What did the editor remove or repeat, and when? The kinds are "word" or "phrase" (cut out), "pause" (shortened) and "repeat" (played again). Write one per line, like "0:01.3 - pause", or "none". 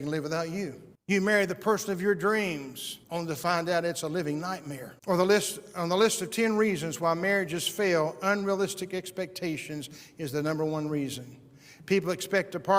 0:00.9 - pause
0:03.0 - pause
0:05.0 - pause